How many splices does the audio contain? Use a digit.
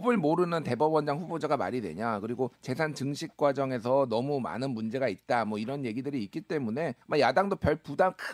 2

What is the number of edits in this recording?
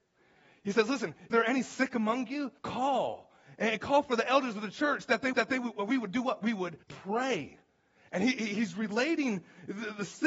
4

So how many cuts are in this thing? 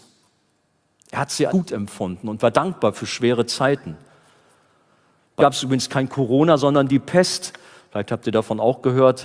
2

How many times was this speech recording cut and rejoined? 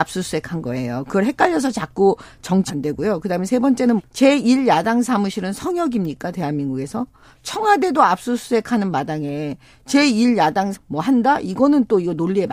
3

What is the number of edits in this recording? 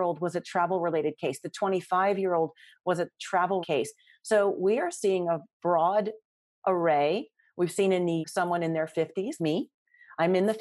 3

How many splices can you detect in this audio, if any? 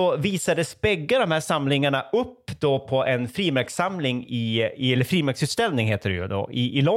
0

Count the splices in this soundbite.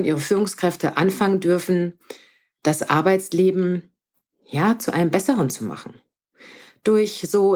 0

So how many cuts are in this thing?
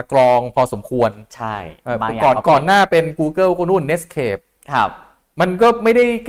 0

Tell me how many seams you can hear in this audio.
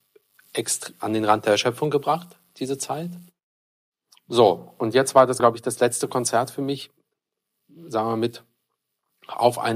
1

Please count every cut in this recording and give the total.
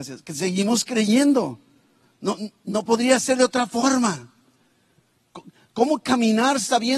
0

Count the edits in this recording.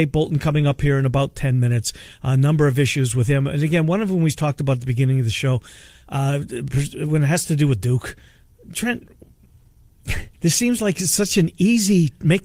1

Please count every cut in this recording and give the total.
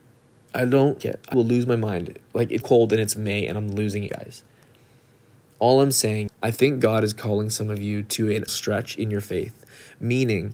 6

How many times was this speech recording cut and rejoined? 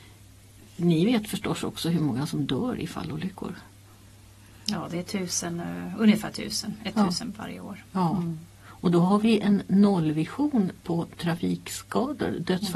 0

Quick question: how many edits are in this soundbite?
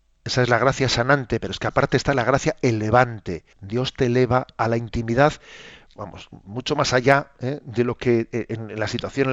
1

